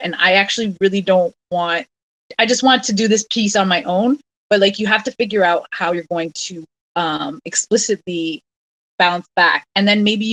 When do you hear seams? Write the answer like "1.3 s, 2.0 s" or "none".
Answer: 8.9 s